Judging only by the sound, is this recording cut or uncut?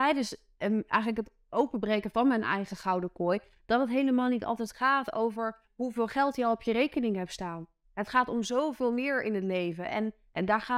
cut